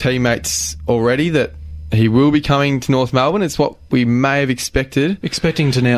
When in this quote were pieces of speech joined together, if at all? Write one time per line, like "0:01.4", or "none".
none